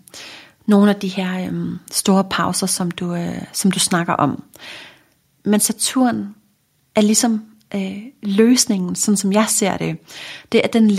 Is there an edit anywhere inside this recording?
no; 0 cuts

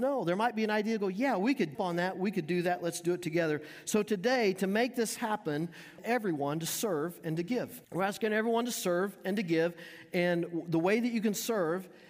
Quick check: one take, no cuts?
no; 3 cuts; at 1.7 s, 6.0 s, 7.8 s

